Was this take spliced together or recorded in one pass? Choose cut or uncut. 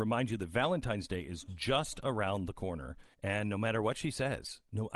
cut